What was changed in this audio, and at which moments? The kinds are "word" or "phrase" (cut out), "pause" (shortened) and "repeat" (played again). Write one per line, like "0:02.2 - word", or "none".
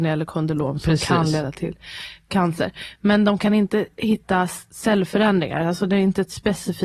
none